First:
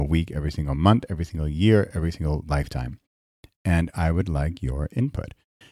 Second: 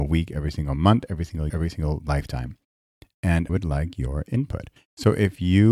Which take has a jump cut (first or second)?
second